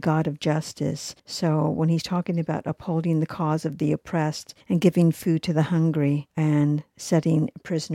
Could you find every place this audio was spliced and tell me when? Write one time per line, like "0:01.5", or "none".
0:01.2
0:04.6
0:06.3